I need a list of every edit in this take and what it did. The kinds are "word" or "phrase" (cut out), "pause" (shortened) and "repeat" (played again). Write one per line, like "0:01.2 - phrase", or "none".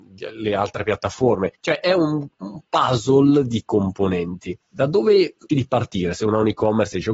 0:01.5 - pause
0:03.7 - word
0:04.6 - pause
0:05.5 - word